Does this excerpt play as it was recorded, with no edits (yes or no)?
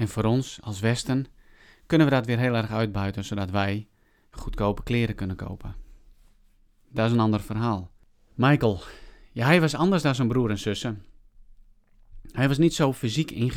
yes